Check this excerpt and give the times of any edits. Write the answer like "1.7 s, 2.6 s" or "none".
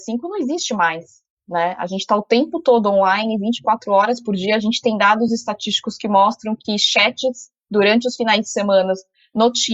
none